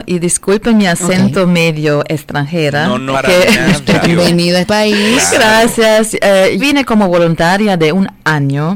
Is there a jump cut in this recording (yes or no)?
yes